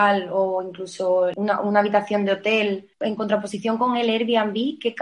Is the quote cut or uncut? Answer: uncut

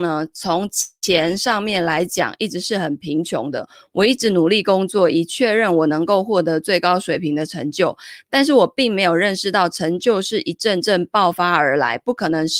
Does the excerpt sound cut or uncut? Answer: uncut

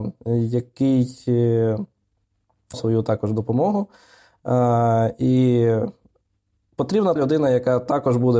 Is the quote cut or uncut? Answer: cut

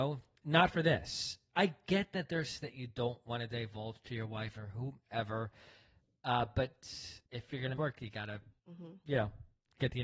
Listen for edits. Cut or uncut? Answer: cut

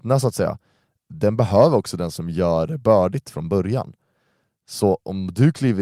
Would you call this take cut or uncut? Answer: uncut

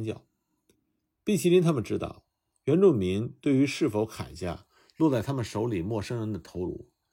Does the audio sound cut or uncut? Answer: uncut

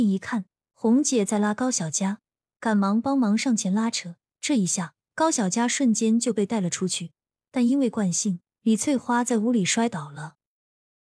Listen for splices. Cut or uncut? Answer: uncut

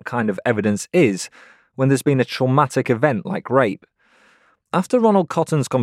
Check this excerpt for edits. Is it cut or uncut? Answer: uncut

